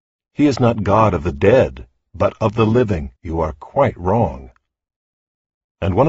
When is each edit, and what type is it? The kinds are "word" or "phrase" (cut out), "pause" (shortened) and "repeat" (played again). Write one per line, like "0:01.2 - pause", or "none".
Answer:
0:03.2 - pause